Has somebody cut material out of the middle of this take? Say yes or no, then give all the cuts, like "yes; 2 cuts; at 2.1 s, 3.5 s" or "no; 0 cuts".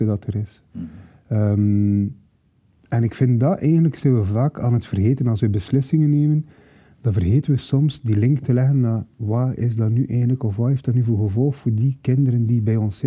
no; 0 cuts